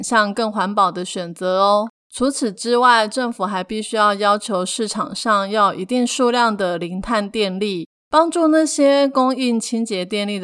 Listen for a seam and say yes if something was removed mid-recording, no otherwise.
yes